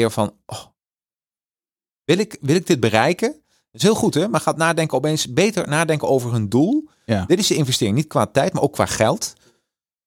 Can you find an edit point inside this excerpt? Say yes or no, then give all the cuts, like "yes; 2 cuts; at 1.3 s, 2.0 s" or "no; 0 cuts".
no; 0 cuts